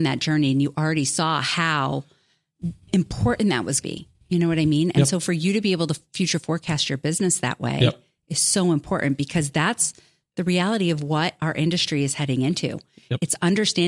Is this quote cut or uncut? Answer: cut